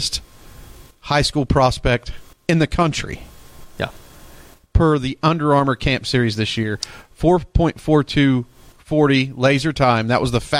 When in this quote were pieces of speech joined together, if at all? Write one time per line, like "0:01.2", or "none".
0:02.3